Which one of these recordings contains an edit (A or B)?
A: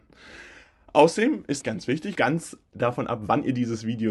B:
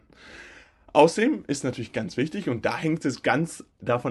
A